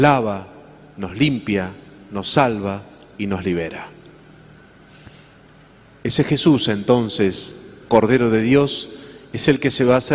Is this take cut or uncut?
uncut